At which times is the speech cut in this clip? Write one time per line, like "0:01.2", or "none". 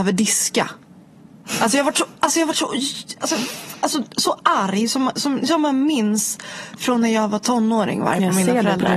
none